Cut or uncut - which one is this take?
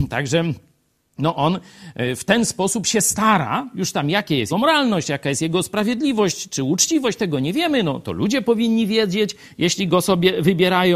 cut